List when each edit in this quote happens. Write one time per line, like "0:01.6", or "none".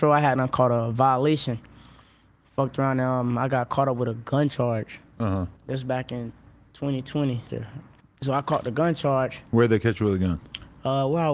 0:05.6
0:07.5
0:08.0